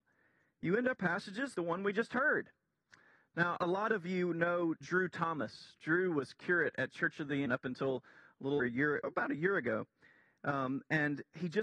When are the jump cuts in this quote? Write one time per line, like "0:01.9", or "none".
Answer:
0:01.0
0:01.5
0:03.6
0:04.8
0:07.5
0:08.6
0:09.0